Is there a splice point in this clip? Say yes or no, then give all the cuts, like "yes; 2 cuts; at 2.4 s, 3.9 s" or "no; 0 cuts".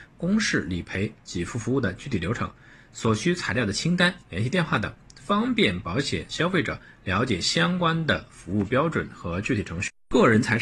no; 0 cuts